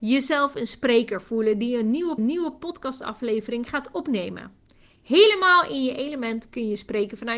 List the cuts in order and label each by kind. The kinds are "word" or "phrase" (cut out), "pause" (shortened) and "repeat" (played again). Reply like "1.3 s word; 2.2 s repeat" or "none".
2.2 s repeat